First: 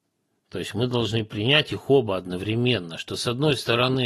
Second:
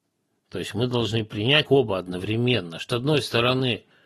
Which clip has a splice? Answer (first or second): second